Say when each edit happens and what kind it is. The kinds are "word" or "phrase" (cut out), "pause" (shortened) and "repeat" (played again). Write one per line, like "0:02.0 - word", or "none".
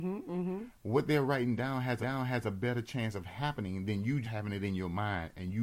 0:02.0 - repeat
0:04.2 - word